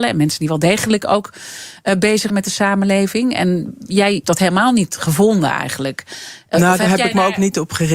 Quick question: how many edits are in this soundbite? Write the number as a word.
two